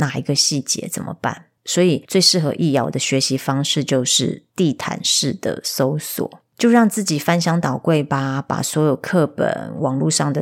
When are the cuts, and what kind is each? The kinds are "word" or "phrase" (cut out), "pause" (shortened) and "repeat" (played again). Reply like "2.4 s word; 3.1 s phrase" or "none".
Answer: 1.6 s pause; 4.5 s pause